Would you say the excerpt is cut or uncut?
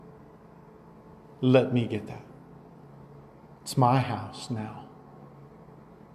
uncut